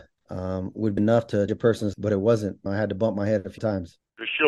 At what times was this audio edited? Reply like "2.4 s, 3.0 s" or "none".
1.0 s, 1.5 s, 1.9 s, 2.7 s, 3.6 s